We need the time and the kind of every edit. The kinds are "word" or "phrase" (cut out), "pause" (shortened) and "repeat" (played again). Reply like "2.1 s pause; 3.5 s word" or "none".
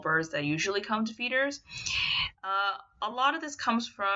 none

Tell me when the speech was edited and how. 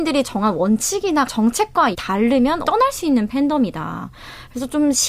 1.3 s word; 1.9 s word; 2.6 s word

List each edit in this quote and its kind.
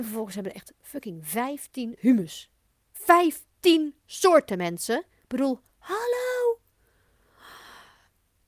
2.0 s word

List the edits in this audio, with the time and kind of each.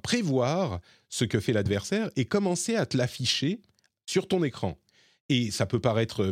none

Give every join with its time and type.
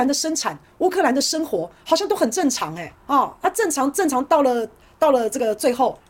3.0 s pause

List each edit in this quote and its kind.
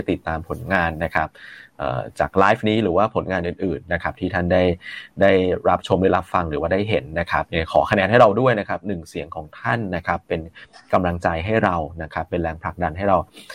none

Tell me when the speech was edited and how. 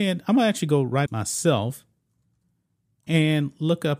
1.1 s phrase

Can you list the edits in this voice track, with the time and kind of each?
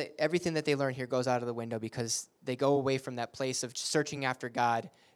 none

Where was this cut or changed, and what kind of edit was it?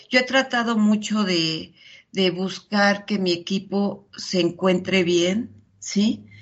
none

